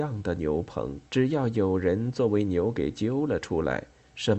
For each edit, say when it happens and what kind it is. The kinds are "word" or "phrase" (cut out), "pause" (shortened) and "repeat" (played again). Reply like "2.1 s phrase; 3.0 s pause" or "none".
1.1 s pause